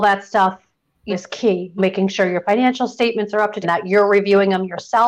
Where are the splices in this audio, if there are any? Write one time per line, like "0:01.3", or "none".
0:01.1
0:01.8
0:03.6